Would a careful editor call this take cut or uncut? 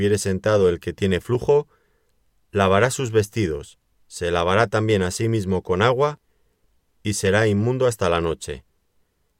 uncut